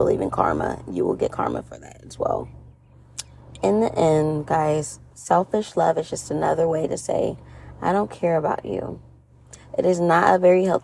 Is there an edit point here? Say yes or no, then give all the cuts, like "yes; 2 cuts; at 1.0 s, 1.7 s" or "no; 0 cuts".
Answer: no; 0 cuts